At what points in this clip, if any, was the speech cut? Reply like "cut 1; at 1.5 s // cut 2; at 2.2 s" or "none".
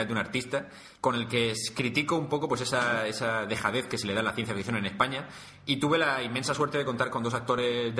cut 1; at 1.0 s